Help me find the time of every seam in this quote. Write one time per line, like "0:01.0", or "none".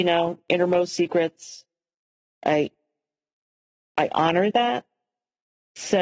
none